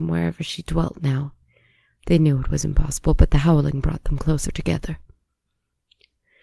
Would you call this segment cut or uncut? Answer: uncut